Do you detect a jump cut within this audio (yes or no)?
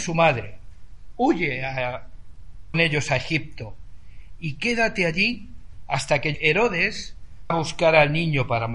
yes